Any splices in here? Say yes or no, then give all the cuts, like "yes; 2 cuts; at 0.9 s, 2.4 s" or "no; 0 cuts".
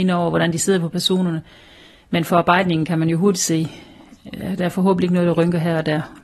no; 0 cuts